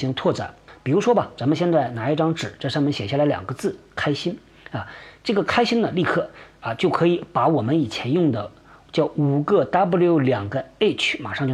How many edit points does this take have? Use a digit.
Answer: 0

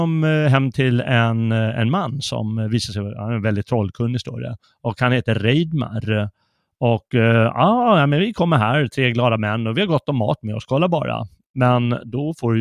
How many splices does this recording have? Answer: 1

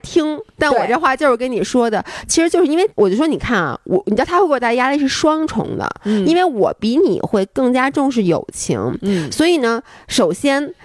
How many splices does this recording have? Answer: 1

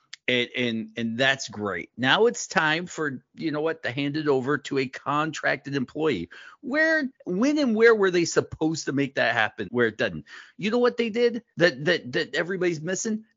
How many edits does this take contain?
3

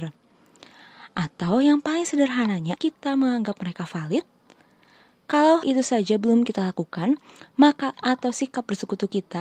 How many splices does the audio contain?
3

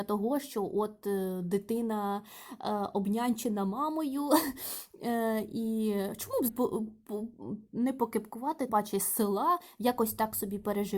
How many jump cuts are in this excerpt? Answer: 2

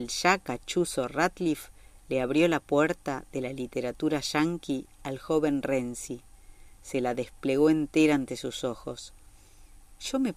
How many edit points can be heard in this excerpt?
0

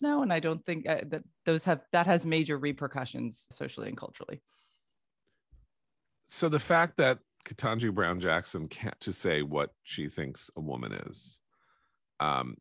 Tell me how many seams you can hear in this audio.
3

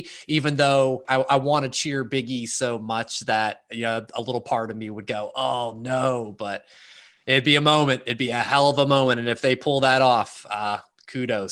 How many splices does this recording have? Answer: 1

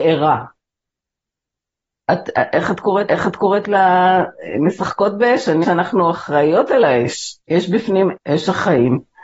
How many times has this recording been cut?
4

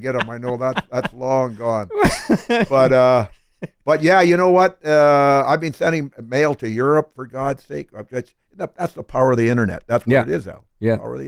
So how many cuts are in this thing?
0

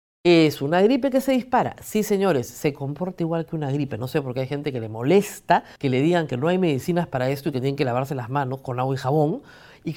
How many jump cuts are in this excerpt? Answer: 1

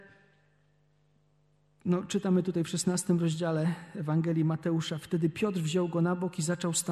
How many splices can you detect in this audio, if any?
0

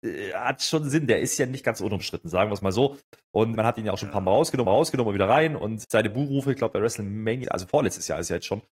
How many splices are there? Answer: 4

